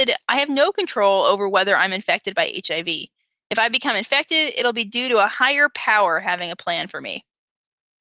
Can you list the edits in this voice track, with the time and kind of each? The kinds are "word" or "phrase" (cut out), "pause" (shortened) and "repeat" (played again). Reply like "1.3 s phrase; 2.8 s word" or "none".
none